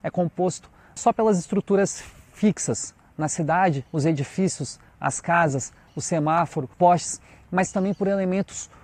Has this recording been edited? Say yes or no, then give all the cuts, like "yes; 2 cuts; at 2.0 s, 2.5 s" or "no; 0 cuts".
yes; 4 cuts; at 1.0 s, 3.9 s, 5.9 s, 6.7 s